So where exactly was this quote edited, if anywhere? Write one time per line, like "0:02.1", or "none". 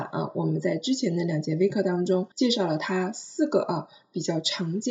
0:02.3